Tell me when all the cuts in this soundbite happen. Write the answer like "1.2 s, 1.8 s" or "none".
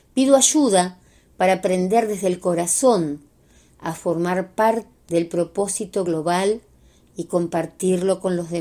4.9 s